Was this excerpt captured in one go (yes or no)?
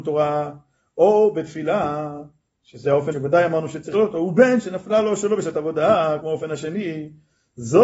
no